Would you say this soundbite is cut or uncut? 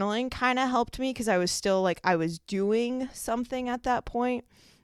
uncut